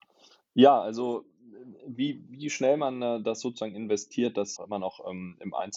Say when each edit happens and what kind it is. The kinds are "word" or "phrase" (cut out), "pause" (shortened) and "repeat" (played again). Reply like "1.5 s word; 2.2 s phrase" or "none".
4.6 s phrase